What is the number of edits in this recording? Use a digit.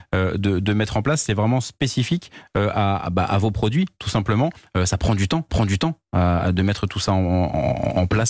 1